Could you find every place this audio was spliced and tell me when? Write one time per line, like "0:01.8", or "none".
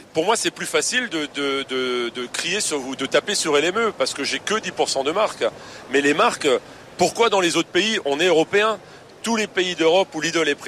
none

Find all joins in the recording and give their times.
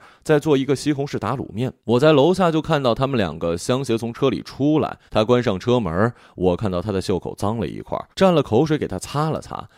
0:01.8
0:05.1
0:08.1

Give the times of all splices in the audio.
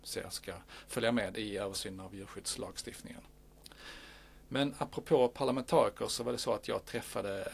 none

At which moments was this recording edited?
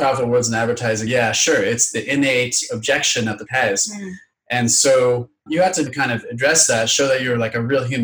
0:01.1
0:03.5
0:05.5
0:05.9

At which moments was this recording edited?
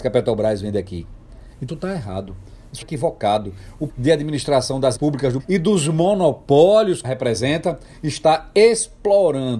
0:01.7
0:02.8
0:03.9
0:05.0
0:05.4
0:07.0

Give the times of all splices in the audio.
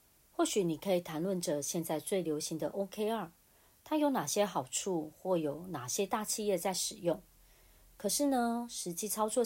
none

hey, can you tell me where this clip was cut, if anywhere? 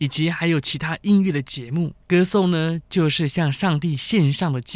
0:02.0

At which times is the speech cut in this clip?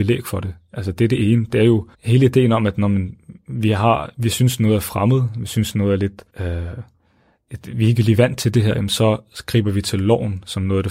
0:01.9
0:06.3

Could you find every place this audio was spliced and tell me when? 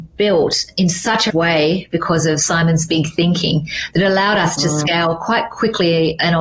0:01.3

